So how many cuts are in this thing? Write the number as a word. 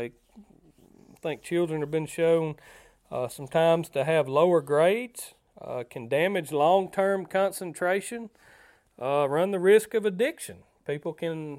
zero